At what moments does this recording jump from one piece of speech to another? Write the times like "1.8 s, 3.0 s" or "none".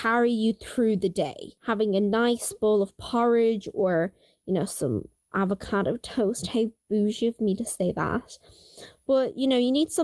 1.6 s

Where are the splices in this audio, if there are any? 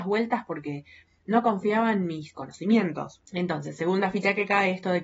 3.2 s

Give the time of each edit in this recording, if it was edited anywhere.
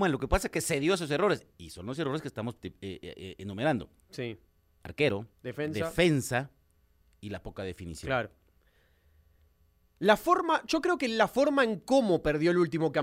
5.3 s

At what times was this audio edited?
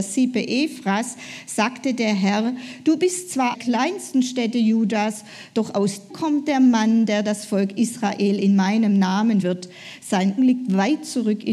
3.5 s, 6.1 s, 9.4 s, 10.4 s

